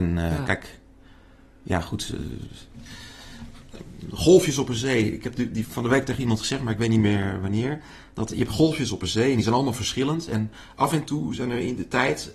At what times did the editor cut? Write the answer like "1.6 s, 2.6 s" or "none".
5.6 s